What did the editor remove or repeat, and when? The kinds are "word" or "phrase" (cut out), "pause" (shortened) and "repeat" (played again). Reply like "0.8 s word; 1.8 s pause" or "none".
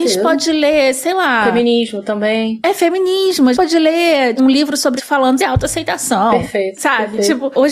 3.5 s word; 4.4 s word; 5.0 s word; 5.4 s word